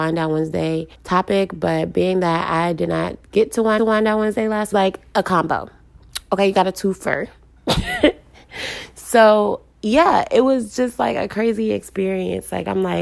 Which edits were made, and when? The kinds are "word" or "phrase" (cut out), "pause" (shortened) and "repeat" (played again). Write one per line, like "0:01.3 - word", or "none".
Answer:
0:00.9 - pause
0:03.8 - repeat
0:04.7 - phrase